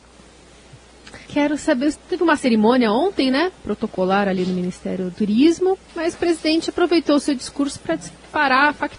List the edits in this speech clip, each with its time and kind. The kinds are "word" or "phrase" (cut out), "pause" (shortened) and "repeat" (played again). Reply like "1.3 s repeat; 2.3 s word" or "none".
1.2 s pause; 1.9 s phrase; 5.1 s word; 5.9 s pause

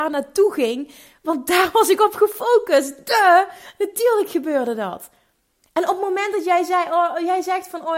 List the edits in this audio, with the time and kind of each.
none

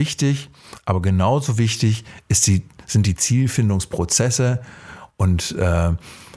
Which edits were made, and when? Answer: none

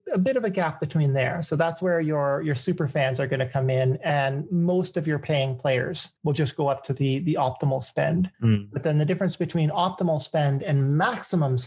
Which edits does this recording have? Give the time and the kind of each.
6.2 s pause; 8.3 s pause

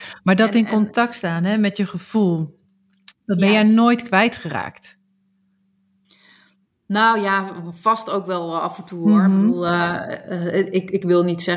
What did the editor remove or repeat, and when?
none

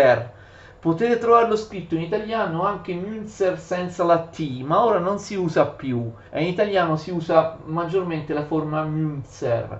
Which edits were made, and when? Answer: 6.3 s pause

